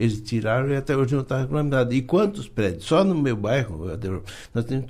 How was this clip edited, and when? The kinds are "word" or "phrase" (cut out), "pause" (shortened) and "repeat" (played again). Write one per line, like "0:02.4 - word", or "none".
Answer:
none